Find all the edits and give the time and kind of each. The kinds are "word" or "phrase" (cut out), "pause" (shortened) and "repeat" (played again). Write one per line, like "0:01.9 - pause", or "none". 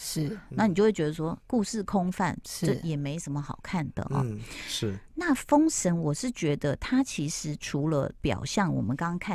0:01.4 - pause